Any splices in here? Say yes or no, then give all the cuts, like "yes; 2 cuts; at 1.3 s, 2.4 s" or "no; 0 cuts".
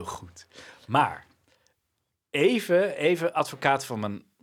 no; 0 cuts